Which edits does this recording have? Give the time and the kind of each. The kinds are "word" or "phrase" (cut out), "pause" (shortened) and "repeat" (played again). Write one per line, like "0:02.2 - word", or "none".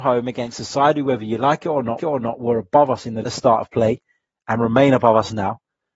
0:02.0 - repeat
0:03.2 - phrase